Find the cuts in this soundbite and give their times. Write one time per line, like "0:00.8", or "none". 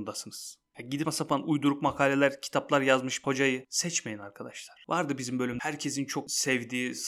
0:01.0
0:03.2
0:05.6